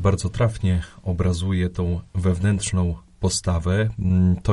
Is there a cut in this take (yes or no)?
no